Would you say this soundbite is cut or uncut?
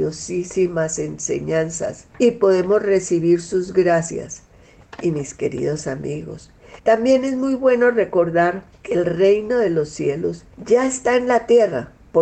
cut